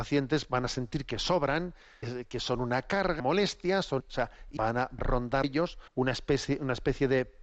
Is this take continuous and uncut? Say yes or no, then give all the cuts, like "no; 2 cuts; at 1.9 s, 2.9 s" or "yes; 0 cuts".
no; 7 cuts; at 2.0 s, 3.2 s, 4.0 s, 4.6 s, 5.0 s, 5.4 s, 5.9 s